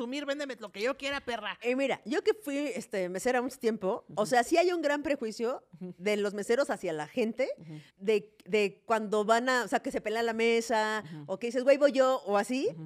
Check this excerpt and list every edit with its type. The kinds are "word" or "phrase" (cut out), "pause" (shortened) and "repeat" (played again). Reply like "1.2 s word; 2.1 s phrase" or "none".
7.9 s pause